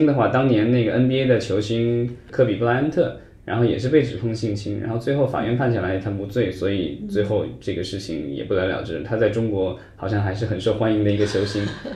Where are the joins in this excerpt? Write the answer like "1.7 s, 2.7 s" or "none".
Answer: none